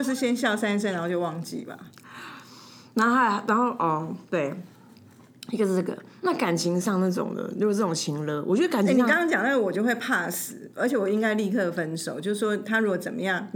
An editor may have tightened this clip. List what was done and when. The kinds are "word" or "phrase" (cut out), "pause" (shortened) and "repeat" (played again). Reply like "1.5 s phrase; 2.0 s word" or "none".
4.2 s pause